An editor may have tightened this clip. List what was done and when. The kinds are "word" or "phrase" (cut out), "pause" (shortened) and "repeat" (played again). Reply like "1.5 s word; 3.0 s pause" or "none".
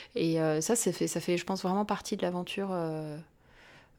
none